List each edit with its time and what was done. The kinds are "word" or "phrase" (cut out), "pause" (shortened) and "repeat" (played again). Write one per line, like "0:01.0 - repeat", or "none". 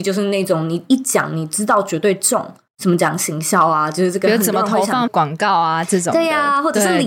0:02.7 - pause
0:05.1 - word

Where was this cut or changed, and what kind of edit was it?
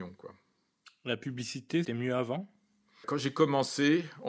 0:01.8 - word
0:03.0 - word

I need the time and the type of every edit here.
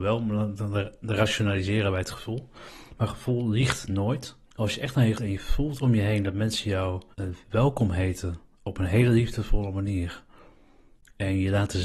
0:04.4 - pause
0:05.1 - phrase
0:07.1 - pause

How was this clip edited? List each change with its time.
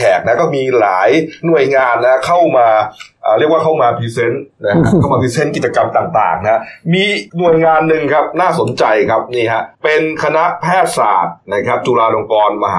0:07.3 - pause
0:09.7 - pause

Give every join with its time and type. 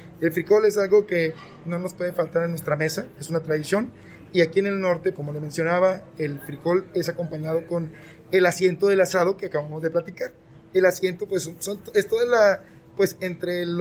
0:05.1 - word

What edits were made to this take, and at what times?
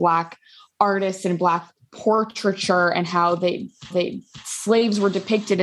0:03.9 - repeat

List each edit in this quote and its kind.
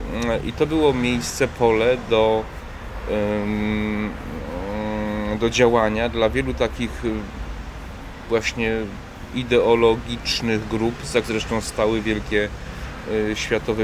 0:11.2 - word

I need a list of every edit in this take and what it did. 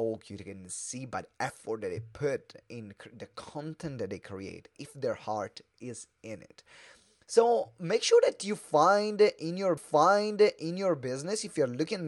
0:09.8 - repeat

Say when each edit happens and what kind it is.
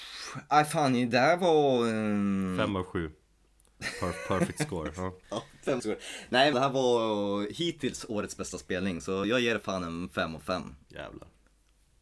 0:05.2 - pause
0:05.8 - phrase
0:06.5 - phrase
0:09.2 - word

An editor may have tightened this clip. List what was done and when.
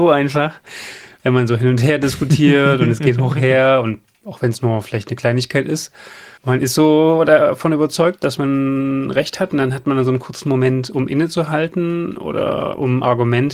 0:06.4 - pause

